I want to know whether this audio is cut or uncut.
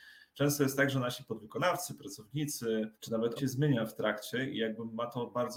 cut